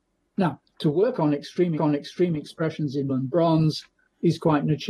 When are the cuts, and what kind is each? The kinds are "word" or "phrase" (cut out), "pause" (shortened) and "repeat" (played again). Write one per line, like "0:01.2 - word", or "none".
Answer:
0:01.8 - repeat
0:03.1 - word